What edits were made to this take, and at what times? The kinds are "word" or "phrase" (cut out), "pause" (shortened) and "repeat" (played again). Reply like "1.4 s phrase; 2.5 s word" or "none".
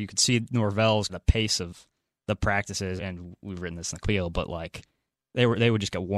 1.1 s word; 3.0 s word; 4.0 s word